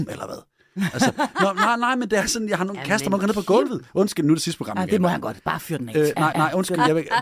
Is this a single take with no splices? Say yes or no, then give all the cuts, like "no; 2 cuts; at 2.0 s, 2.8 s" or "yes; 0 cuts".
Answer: no; 1 cut; at 6.3 s